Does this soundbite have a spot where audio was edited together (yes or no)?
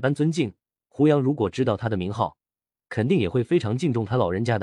no